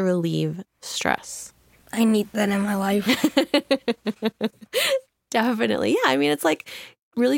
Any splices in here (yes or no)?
no